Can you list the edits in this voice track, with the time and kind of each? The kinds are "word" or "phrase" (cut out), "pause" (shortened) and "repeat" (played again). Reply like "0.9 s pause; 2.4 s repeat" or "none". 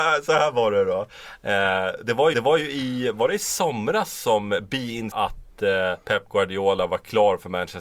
2.3 s repeat; 5.1 s phrase; 6.0 s pause